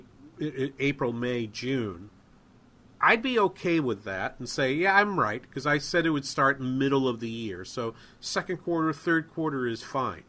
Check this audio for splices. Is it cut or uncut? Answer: uncut